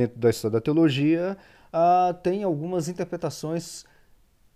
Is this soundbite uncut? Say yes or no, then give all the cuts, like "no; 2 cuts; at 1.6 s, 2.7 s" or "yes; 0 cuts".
yes; 0 cuts